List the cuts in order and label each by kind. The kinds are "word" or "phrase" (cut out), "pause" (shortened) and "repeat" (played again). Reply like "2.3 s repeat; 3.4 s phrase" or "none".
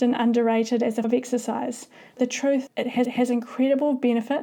1.0 s word; 2.2 s word; 2.7 s word; 3.1 s repeat